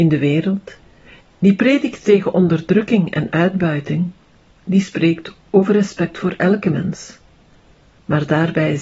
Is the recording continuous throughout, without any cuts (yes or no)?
yes